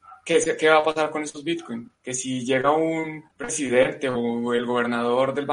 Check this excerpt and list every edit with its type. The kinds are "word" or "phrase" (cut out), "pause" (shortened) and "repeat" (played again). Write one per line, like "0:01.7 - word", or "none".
0:02.0 - pause
0:03.3 - pause